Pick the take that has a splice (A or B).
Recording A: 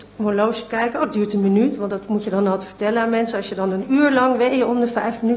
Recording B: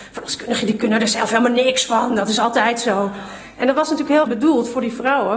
B